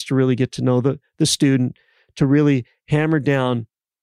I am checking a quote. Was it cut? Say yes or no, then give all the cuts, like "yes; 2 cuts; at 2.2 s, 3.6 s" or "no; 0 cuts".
no; 0 cuts